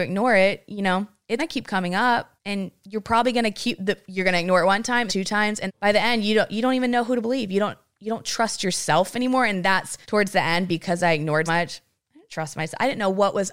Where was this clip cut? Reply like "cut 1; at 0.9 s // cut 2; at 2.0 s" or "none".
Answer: cut 1; at 1.4 s // cut 2; at 2.4 s // cut 3; at 5.1 s // cut 4; at 5.7 s // cut 5; at 10.0 s // cut 6; at 11.5 s